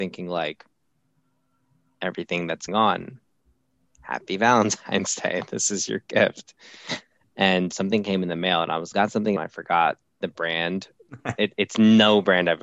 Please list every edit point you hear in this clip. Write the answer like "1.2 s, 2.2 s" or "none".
2.7 s, 7.7 s, 8.9 s, 9.4 s